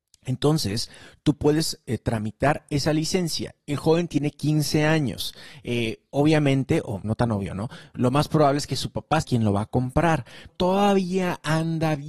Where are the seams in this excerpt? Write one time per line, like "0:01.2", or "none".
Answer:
0:07.0
0:09.2
0:10.5